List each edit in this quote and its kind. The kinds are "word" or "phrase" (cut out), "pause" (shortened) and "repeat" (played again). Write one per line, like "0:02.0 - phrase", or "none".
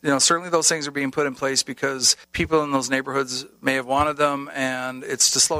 0:02.2 - pause